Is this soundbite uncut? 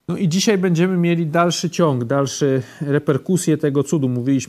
yes; 0 cuts

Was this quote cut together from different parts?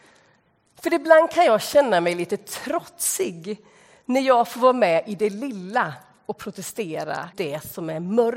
yes; 1 cut; at 7.3 s

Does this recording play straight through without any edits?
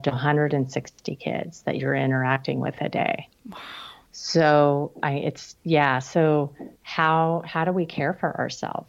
no; 1 cut; at 6.8 s

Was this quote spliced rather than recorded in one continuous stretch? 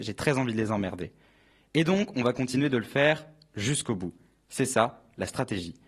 no; 0 cuts

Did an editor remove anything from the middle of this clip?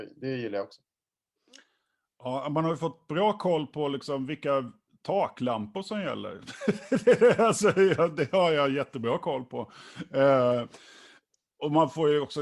no; 0 cuts

